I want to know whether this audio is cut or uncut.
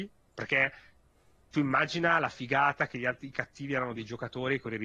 cut